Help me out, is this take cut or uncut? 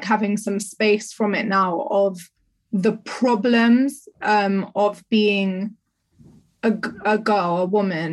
uncut